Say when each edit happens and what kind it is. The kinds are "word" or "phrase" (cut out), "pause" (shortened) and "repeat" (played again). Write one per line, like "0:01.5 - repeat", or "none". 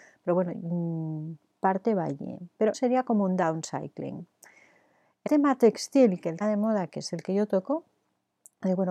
0:02.7 - word
0:05.3 - word
0:06.4 - word

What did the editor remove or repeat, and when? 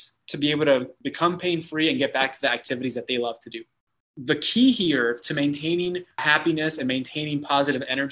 none

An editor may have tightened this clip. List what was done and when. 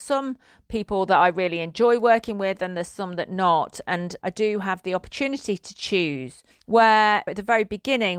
0:06.5 - pause

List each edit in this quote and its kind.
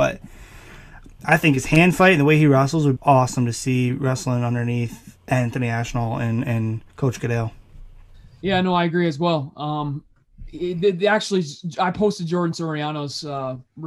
0:03.0 - word
0:06.9 - pause
0:08.1 - pause

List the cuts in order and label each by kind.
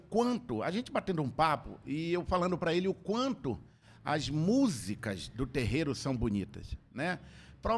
none

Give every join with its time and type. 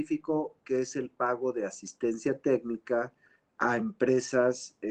none

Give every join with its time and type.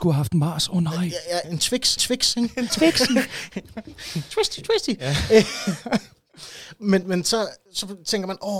0:01.4 - phrase
0:02.0 - repeat
0:02.7 - word
0:07.0 - word
0:07.7 - pause

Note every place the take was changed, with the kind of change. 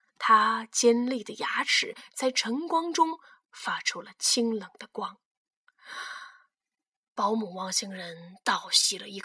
none

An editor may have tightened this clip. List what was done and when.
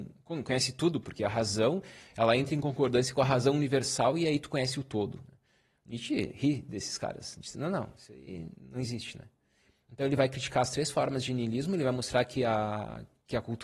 none

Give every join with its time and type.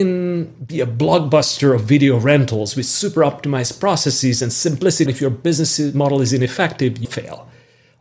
0:05.1 - word
0:07.0 - word

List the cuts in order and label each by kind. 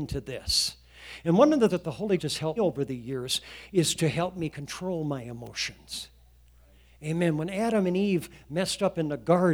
0:01.7 - word
0:02.2 - word
0:02.6 - word

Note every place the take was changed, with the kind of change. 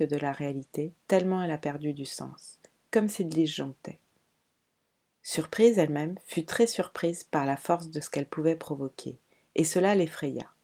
none

